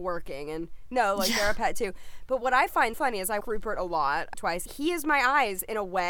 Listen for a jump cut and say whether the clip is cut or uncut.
cut